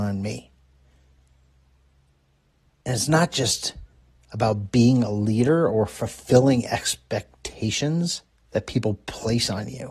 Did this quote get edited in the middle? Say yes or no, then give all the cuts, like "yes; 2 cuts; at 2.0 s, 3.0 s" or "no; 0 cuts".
no; 0 cuts